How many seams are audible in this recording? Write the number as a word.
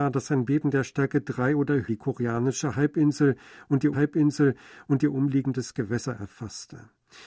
two